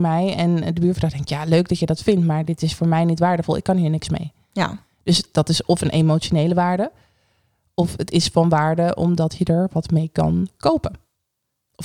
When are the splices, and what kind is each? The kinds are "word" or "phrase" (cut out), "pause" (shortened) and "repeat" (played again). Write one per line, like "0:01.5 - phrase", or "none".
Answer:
none